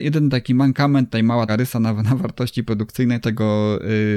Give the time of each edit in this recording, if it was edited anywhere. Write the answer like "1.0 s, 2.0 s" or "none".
1.5 s, 3.2 s